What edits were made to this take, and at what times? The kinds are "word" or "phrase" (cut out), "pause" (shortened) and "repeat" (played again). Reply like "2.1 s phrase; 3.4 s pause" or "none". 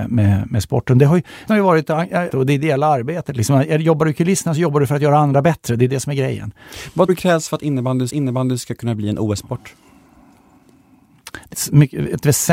1.5 s word; 2.3 s word; 7.1 s word; 8.1 s repeat; 11.5 s word